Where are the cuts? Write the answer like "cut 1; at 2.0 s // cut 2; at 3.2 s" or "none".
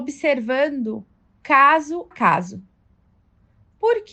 cut 1; at 2.1 s